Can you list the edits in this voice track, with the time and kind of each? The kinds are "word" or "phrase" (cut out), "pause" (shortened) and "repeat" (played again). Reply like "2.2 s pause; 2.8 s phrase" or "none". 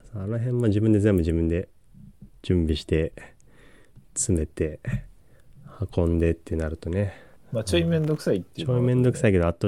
7.4 s pause

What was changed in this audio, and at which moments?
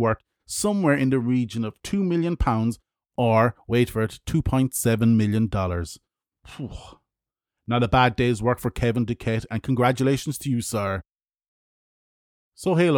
none

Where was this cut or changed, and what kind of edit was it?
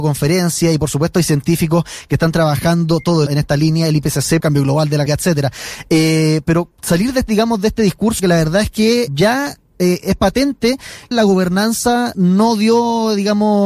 3.3 s word; 4.4 s phrase; 5.1 s word; 6.7 s pause; 8.2 s word; 9.1 s word; 11.1 s word

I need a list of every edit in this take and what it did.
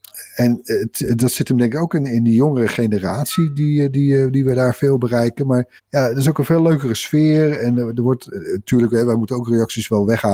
5.8 s pause

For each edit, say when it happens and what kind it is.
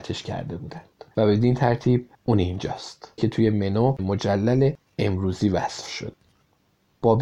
1.1 s pause; 2.1 s pause; 3.2 s word; 4.0 s word

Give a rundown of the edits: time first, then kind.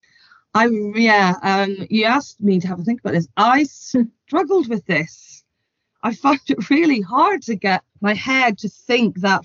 7.9 s pause

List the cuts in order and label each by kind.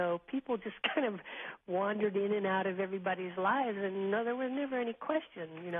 none

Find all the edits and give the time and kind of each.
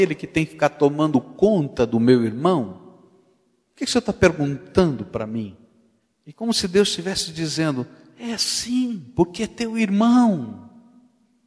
none

